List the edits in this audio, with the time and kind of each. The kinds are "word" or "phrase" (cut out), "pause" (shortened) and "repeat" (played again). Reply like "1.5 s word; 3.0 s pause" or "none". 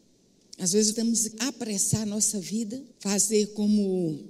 0.9 s word; 1.3 s word; 2.9 s pause